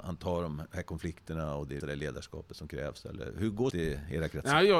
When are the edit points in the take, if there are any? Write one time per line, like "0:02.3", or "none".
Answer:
0:01.8
0:03.7